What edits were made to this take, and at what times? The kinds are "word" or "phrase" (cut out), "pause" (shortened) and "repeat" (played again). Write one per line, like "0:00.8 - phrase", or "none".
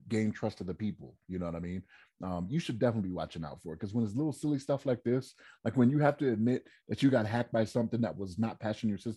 none